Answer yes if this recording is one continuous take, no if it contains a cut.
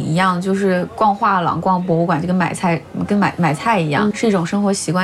no